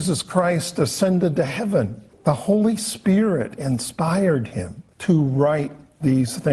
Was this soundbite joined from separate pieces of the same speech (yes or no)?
yes